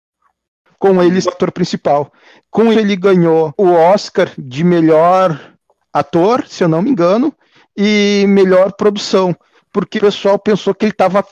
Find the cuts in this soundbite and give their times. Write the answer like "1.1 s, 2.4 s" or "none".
1.2 s, 2.7 s, 10.0 s